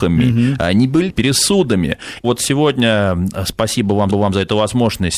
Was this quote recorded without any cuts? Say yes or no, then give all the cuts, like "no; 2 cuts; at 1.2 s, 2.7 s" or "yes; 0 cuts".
no; 3 cuts; at 1.1 s, 2.2 s, 4.1 s